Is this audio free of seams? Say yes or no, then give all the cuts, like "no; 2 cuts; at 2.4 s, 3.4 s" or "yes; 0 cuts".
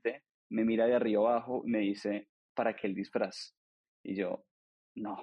yes; 0 cuts